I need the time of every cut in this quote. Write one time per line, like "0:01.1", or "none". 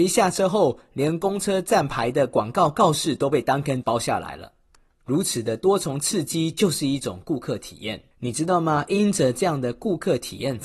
0:03.8
0:08.1